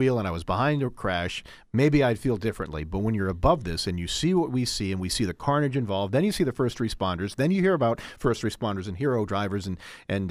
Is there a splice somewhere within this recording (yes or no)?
no